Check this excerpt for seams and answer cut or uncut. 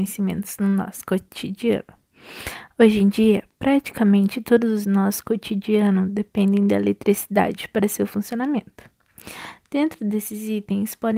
cut